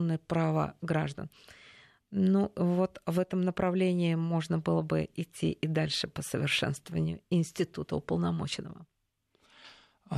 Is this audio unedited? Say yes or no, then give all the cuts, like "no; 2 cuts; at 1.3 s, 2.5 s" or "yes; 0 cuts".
yes; 0 cuts